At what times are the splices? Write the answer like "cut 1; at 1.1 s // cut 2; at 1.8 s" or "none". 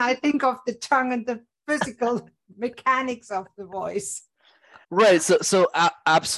cut 1; at 4.8 s